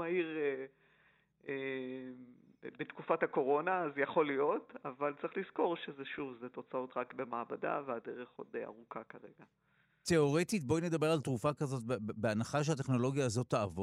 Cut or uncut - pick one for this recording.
uncut